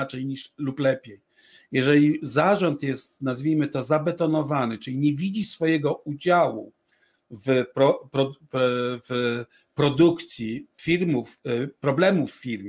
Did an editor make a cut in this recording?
no; 0 cuts

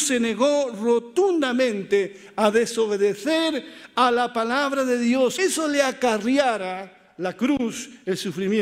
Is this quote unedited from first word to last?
no; 1 cut; at 5.4 s

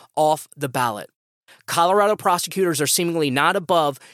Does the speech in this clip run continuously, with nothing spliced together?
yes; 0 cuts

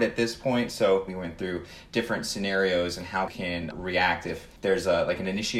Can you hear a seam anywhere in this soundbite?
yes; 4 cuts; at 1.1 s, 3.3 s, 3.7 s, 4.6 s

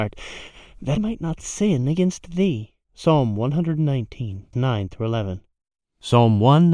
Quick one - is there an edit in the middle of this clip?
yes; 3 cuts; at 1.0 s, 2.8 s, 4.5 s

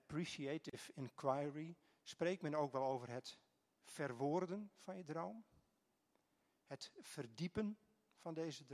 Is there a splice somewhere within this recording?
no; 0 cuts

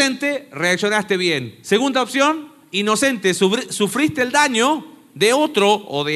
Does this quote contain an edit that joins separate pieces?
no; 0 cuts

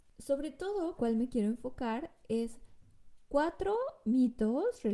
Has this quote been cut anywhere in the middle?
yes; 1 cut; at 1.0 s

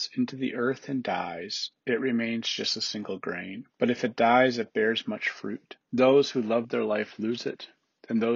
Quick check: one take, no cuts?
no; 2 cuts; at 3.7 s, 5.8 s

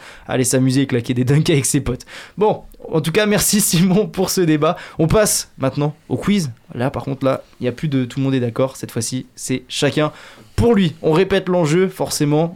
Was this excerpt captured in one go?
no; 1 cut; at 7.5 s

